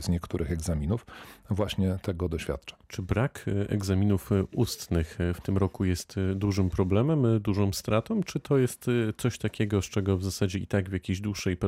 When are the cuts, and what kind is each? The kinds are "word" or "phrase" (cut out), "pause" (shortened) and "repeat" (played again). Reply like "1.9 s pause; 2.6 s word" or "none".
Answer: 2.8 s pause